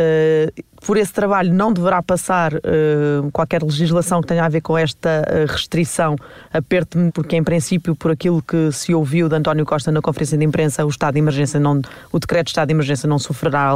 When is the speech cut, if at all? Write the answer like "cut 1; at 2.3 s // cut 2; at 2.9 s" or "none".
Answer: cut 1; at 7.1 s